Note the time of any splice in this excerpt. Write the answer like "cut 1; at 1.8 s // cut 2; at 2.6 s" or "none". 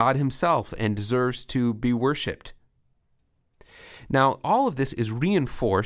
none

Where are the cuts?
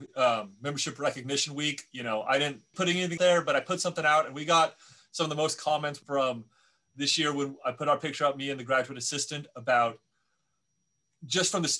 cut 1; at 2.7 s // cut 2; at 3.2 s // cut 3; at 6.0 s

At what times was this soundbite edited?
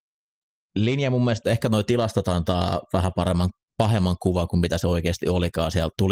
none

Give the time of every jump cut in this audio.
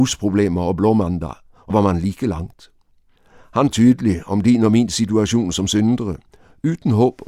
cut 1; at 1.7 s // cut 2; at 3.7 s

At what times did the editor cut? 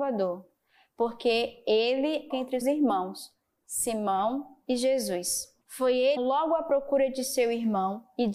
cut 1; at 2.3 s // cut 2; at 2.6 s // cut 3; at 5.6 s // cut 4; at 6.2 s

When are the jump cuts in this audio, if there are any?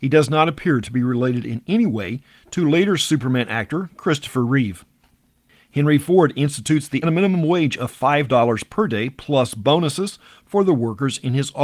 cut 1; at 7.0 s

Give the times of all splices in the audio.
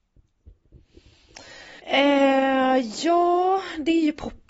cut 1; at 1.8 s

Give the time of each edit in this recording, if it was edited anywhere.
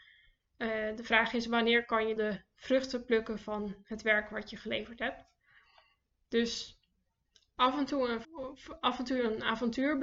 cut 1; at 2.2 s // cut 2; at 8.2 s

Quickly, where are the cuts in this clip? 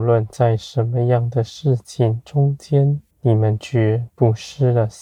cut 1; at 3.1 s

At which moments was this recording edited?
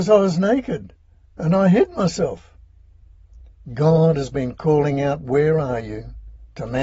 none

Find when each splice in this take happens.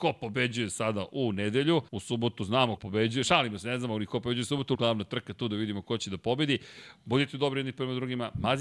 cut 1; at 1.9 s // cut 2; at 2.8 s // cut 3; at 4.7 s

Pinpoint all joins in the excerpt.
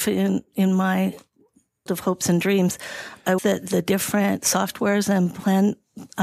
cut 1; at 1.9 s // cut 2; at 3.4 s

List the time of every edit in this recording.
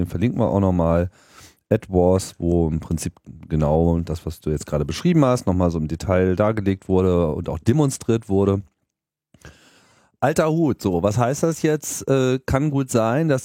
none

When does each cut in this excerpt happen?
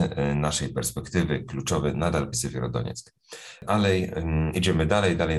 cut 1; at 2.3 s

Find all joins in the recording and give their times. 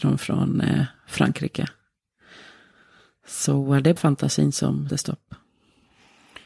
cut 1; at 4.0 s // cut 2; at 4.9 s

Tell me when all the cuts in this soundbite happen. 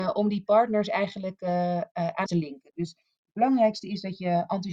cut 1; at 2.3 s

